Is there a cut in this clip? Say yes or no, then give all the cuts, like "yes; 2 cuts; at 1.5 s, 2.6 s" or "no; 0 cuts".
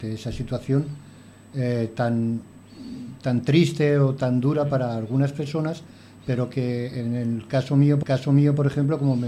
yes; 1 cut; at 8.0 s